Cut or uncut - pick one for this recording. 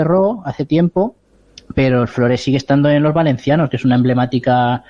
uncut